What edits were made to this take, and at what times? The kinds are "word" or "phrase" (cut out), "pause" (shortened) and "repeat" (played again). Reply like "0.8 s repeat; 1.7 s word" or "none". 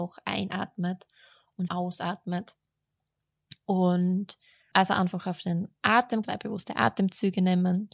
1.7 s word; 4.7 s word; 6.2 s word